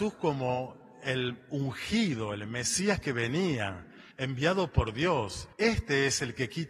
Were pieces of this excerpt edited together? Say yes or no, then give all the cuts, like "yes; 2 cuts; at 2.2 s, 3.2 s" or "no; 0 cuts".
yes; 2 cuts; at 4.1 s, 5.5 s